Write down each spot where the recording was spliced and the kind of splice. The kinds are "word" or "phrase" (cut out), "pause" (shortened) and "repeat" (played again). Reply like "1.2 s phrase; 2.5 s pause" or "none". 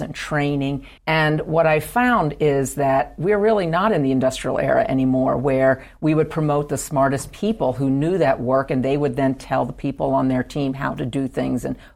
1.0 s pause